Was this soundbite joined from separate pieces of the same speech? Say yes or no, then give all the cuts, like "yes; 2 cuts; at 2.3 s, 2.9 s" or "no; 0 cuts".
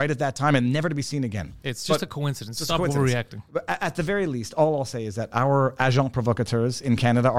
no; 0 cuts